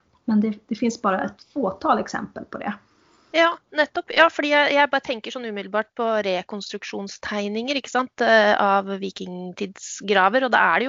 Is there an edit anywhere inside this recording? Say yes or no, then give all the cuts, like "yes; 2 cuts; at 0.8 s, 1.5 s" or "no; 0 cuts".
no; 0 cuts